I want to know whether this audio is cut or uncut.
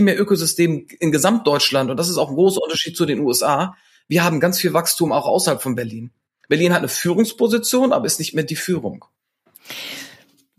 uncut